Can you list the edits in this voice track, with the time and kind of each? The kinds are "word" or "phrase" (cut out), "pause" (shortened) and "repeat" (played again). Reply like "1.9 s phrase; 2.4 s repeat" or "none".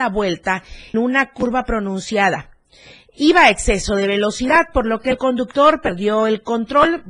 0.9 s word